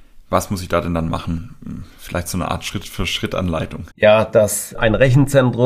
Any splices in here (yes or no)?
yes